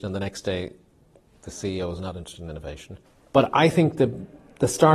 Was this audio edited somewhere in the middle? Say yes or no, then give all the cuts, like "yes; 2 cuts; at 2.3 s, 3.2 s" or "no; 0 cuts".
no; 0 cuts